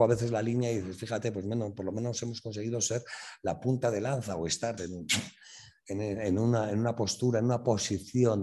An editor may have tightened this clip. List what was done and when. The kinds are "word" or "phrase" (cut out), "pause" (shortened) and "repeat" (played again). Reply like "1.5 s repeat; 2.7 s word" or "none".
4.8 s word